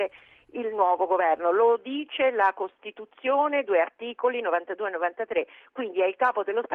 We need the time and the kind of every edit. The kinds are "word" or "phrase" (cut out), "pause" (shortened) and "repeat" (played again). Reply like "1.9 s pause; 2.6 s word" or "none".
none